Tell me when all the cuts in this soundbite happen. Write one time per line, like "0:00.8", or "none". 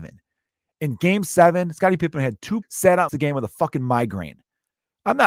0:02.6
0:03.1